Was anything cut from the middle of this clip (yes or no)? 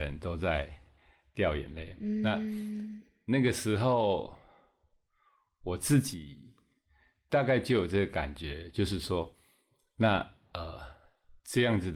no